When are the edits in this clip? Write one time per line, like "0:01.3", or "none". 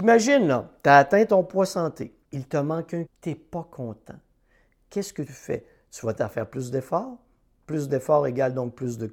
0:02.2
0:03.1
0:05.3
0:06.2